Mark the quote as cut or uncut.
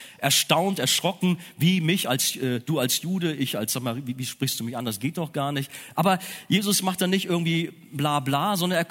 uncut